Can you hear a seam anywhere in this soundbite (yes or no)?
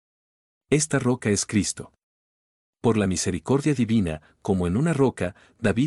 no